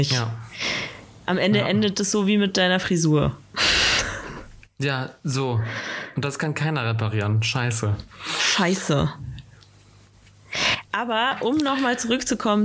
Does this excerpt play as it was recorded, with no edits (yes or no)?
yes